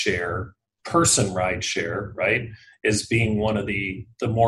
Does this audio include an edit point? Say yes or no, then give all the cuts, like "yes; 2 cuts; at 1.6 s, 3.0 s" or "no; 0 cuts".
no; 0 cuts